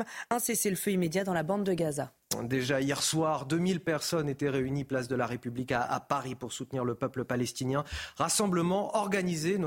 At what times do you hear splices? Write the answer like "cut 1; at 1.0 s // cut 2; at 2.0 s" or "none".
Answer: none